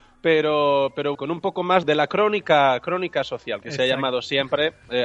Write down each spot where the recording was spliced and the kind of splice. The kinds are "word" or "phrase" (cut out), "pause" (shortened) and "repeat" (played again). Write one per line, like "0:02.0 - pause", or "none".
0:01.1 - word
0:01.8 - word